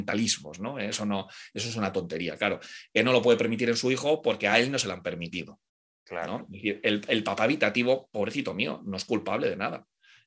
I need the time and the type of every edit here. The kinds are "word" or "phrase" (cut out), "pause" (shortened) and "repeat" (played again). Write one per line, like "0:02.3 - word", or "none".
none

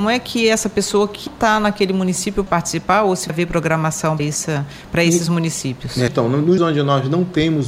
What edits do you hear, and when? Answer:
0:01.3 - word
0:02.5 - word
0:03.3 - word
0:04.2 - word
0:06.1 - word
0:06.6 - word

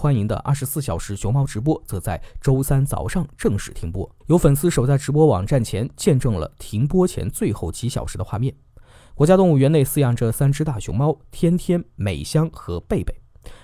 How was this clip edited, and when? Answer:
0:04.2 - pause

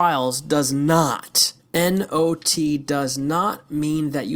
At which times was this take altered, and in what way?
0:01.6 - pause

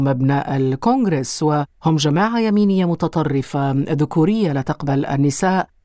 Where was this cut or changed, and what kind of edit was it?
none

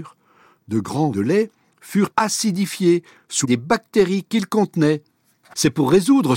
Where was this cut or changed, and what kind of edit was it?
0:01.1 - word
0:02.1 - word
0:03.4 - word

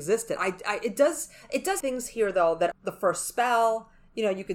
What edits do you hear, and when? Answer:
0:01.8 - word
0:02.7 - word

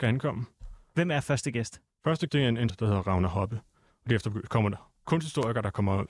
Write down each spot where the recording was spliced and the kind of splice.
0:02.3 - word
0:02.7 - phrase

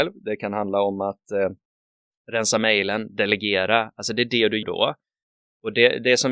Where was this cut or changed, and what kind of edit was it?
0:04.6 - word

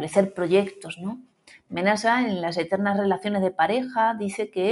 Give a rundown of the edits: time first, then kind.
none

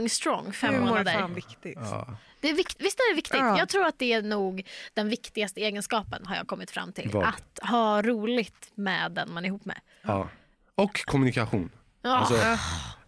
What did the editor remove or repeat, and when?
none

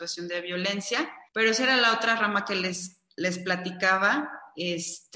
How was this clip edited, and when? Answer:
0:01.3 - pause

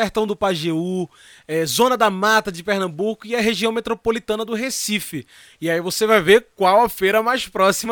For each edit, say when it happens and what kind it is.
none

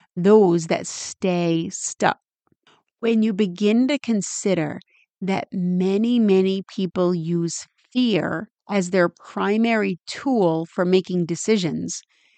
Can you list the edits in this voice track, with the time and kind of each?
0:08.6 - pause

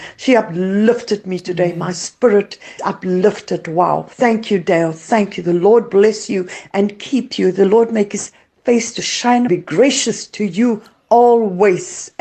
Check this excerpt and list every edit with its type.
0:02.8 - word
0:04.1 - pause
0:09.5 - phrase

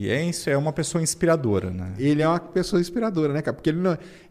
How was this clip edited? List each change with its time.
none

